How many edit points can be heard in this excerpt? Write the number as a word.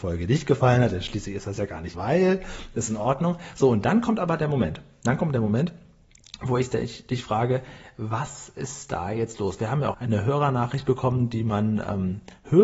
two